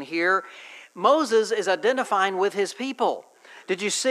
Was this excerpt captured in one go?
yes; 0 cuts

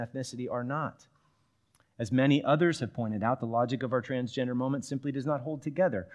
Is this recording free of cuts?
yes; 0 cuts

